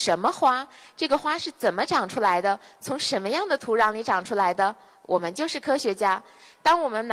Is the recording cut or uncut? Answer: uncut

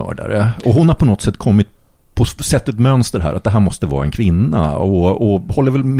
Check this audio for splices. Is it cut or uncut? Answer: uncut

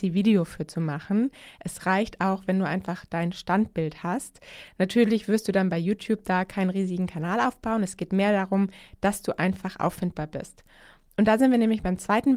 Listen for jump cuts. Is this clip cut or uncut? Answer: uncut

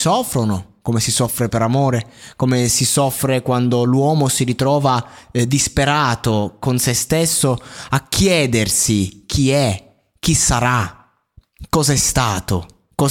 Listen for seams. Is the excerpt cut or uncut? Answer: uncut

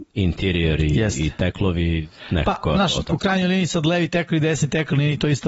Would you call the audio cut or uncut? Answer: uncut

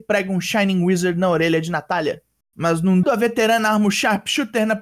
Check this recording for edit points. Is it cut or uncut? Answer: cut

